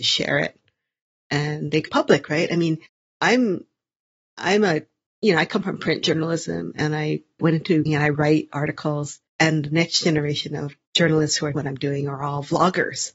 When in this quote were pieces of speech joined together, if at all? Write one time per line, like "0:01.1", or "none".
0:01.9
0:02.9
0:05.1
0:07.4
0:07.9
0:09.3
0:10.9
0:11.6